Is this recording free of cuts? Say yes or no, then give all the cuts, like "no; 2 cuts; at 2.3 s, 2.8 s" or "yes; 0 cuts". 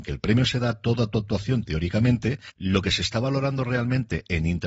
yes; 0 cuts